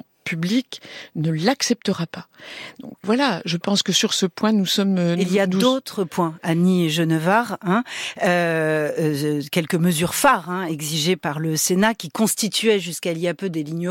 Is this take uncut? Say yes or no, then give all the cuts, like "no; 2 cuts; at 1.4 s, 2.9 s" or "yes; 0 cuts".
no; 1 cut; at 3.0 s